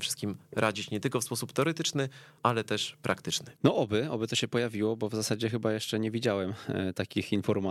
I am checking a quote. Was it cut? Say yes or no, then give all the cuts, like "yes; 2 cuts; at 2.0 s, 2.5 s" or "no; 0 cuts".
yes; 1 cut; at 3.6 s